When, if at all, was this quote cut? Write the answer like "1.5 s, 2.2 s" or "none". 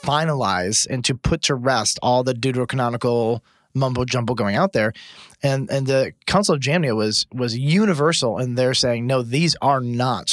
none